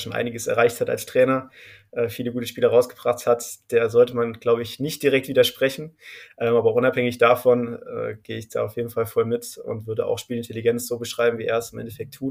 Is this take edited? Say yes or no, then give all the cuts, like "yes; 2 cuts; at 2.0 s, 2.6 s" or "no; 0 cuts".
no; 0 cuts